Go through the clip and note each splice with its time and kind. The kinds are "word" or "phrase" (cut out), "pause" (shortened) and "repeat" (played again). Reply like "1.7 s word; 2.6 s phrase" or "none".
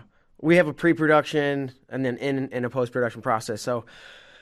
none